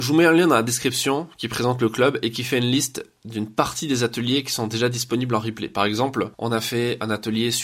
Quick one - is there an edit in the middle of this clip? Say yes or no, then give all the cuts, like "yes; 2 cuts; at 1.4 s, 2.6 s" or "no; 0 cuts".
yes; 1 cut; at 6.3 s